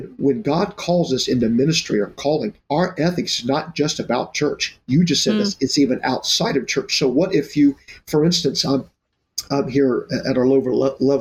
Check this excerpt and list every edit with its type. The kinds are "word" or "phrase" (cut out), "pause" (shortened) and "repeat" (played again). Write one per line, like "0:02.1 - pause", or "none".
0:02.6 - pause

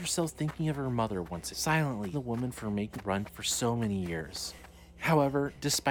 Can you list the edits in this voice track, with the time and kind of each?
0:01.5 - word
0:02.1 - word
0:03.0 - word
0:03.3 - word

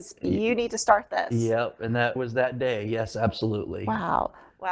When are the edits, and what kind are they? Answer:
0:02.2 - word

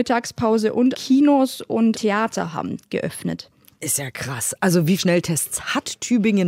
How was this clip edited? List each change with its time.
0:00.9 - word
0:01.9 - word
0:05.0 - word

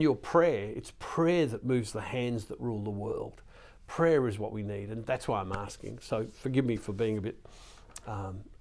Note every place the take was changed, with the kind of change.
none

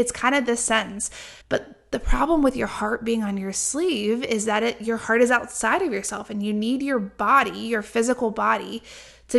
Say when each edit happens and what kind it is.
0:01.4 - pause

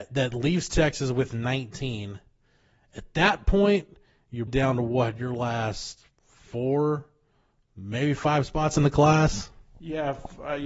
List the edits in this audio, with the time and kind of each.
0:04.5 - word
0:06.1 - pause

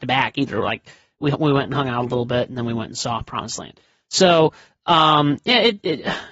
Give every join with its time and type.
none

